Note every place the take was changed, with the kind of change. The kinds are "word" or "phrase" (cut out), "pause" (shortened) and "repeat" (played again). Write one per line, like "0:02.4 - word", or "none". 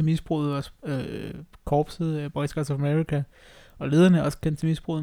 none